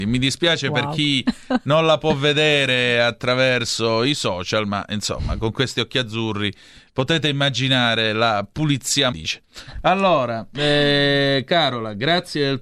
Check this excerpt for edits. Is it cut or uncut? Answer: cut